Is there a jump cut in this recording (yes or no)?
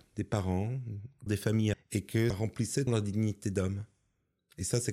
yes